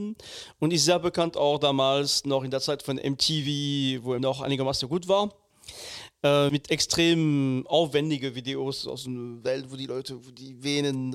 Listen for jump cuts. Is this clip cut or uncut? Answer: cut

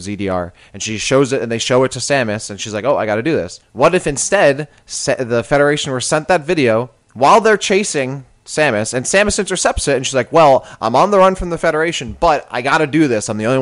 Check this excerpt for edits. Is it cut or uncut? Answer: cut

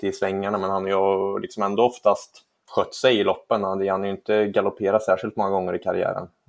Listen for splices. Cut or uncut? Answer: cut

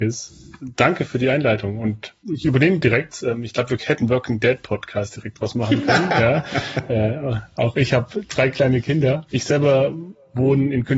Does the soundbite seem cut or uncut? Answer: cut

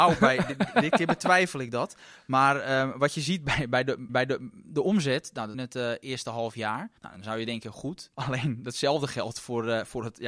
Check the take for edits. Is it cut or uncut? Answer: cut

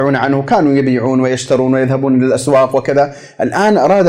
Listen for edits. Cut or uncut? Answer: uncut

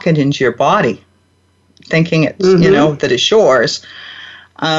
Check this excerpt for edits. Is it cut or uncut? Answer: uncut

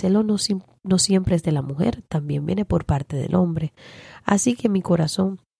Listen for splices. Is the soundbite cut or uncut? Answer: uncut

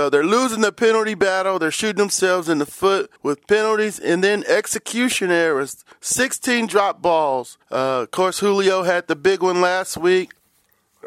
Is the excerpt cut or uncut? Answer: cut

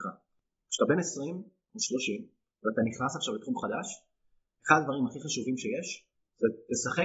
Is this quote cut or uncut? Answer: uncut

